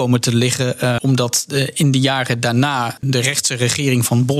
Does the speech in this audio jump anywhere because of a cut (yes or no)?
yes